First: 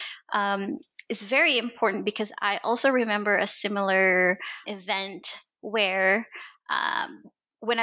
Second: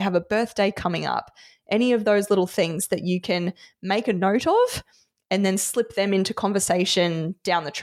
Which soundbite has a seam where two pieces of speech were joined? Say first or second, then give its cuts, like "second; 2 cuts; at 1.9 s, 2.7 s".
first; 1 cut; at 4.6 s